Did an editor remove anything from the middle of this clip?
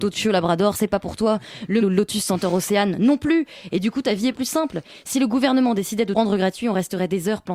yes; 2 cuts; at 1.8 s, 6.1 s

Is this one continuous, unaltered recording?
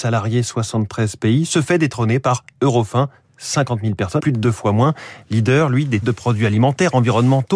no; 2 cuts; at 4.2 s, 6.0 s

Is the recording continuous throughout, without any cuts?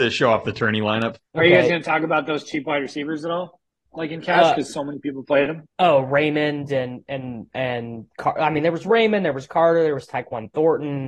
no; 3 cuts; at 1.2 s, 3.7 s, 5.7 s

